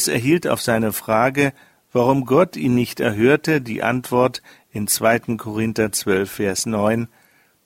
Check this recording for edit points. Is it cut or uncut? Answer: uncut